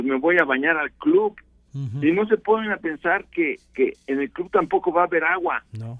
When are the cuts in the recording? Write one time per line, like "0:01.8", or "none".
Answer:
none